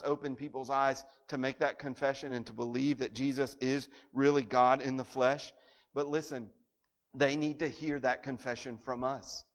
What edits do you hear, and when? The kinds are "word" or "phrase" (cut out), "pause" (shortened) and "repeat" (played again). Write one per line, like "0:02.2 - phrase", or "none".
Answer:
none